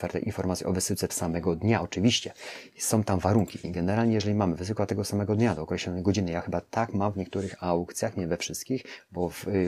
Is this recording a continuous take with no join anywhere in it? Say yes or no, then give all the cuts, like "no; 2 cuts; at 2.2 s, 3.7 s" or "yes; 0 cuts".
no; 2 cuts; at 1.1 s, 3.6 s